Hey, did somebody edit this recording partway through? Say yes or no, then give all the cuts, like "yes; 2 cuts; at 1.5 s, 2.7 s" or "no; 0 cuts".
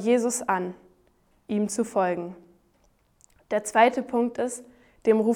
no; 0 cuts